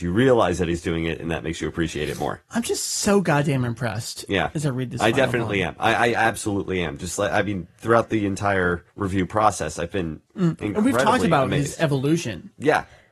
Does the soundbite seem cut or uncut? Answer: cut